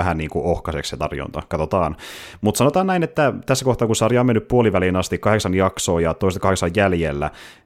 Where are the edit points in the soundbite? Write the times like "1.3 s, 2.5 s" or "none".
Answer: none